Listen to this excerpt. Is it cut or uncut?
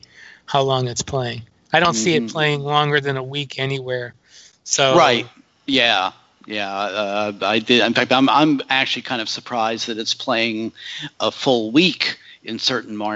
uncut